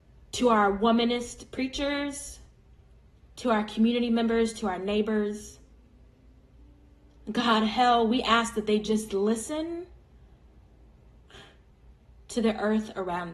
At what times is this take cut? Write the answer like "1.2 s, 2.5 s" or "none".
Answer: none